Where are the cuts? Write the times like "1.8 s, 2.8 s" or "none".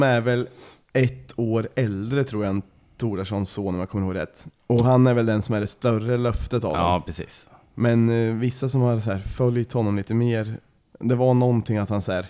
none